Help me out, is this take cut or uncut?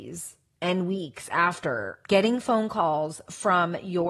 cut